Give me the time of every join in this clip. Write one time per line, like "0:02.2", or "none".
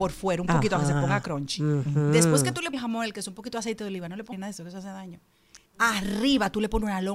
0:02.7
0:04.3
0:05.7